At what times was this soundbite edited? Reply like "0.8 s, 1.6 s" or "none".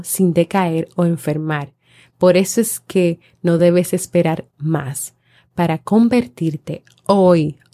none